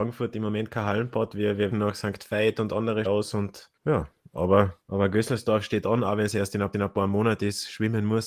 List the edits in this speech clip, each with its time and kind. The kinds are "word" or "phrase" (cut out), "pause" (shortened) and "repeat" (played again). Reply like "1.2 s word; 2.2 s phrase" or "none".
1.7 s word; 3.0 s word; 3.8 s pause; 4.8 s pause; 6.7 s repeat